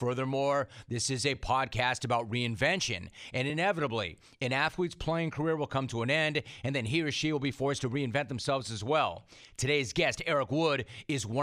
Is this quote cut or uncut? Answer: uncut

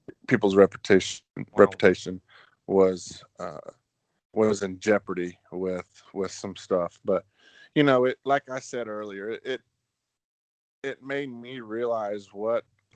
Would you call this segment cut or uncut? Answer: uncut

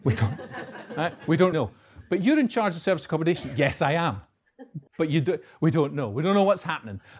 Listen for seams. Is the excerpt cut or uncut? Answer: cut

